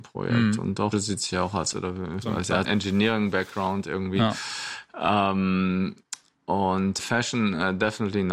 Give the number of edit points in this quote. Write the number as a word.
five